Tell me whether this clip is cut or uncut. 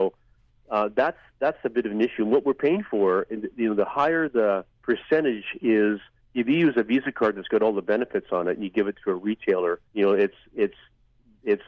cut